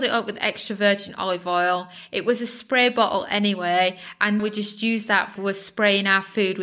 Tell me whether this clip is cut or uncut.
cut